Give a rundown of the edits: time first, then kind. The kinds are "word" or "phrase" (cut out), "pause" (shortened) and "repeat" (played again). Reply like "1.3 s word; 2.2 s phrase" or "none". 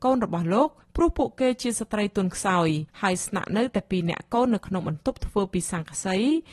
2.9 s pause